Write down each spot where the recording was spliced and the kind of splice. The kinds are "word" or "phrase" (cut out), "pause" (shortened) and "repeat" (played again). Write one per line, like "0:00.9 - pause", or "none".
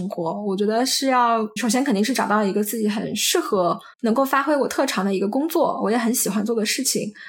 0:01.6 - word
0:03.9 - pause